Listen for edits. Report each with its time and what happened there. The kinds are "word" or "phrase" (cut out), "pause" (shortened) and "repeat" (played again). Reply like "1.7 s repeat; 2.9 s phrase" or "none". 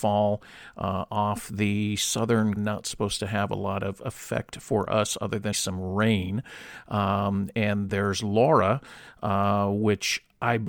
2.6 s phrase; 5.5 s word; 7.9 s word